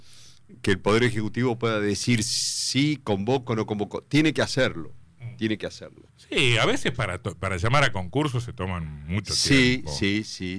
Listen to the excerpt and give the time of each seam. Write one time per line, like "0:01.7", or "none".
0:06.1